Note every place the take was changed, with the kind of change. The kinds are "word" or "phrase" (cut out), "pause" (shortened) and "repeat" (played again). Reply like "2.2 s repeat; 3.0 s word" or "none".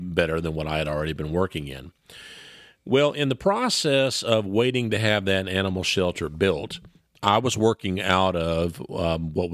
none